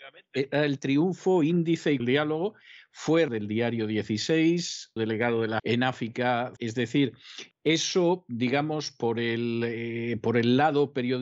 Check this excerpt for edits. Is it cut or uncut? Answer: cut